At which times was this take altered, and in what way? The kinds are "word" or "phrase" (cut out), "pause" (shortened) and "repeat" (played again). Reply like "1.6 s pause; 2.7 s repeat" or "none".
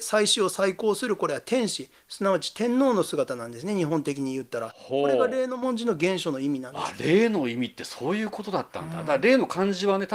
none